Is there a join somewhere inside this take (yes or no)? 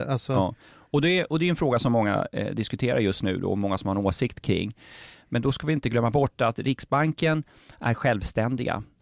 no